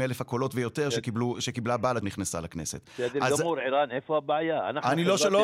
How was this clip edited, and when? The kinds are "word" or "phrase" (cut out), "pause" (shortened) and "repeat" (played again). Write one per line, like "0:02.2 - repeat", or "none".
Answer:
0:02.0 - word

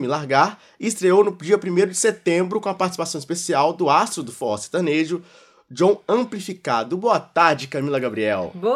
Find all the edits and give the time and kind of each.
none

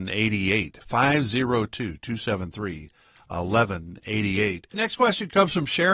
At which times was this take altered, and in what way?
0:04.7 - word

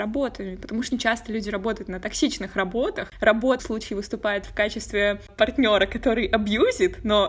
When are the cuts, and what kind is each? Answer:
0:00.9 - word
0:03.6 - phrase

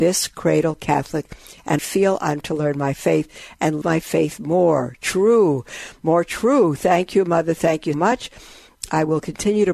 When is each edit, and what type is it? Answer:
0:01.8 - word
0:02.4 - word
0:03.8 - word
0:07.9 - word

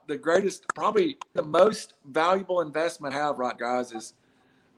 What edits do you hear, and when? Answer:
0:01.4 - word
0:03.1 - word
0:03.6 - word

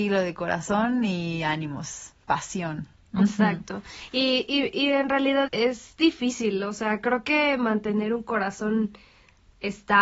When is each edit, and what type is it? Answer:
0:05.5 - word

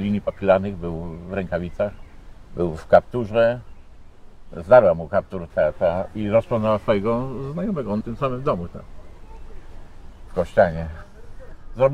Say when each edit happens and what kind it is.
0:05.5 - word
0:08.0 - word

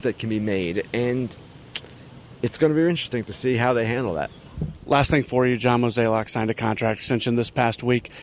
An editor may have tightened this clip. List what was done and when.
none

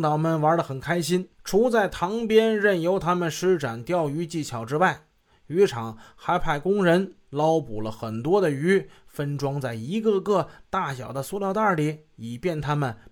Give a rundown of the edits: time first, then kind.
0:01.3 - pause

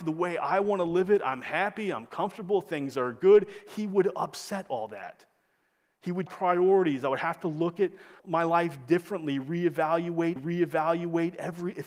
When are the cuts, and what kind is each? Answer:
0:06.3 - phrase
0:08.2 - pause
0:10.4 - repeat

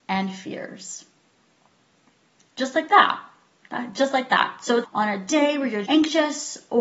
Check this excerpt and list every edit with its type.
0:04.8 - word
0:05.8 - word

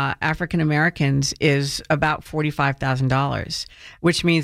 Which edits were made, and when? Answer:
none

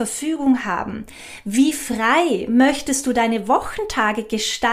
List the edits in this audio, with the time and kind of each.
none

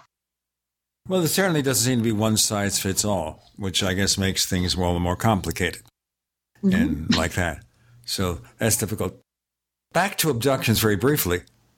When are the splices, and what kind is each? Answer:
none

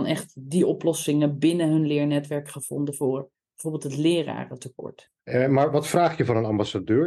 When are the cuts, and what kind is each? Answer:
none

